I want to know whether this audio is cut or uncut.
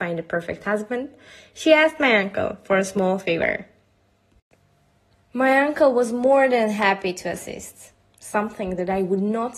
uncut